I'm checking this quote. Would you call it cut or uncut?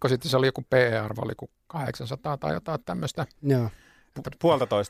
uncut